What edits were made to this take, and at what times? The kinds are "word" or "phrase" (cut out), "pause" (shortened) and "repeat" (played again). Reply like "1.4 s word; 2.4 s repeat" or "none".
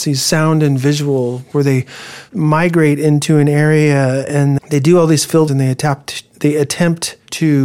1.5 s word; 4.6 s word; 5.5 s word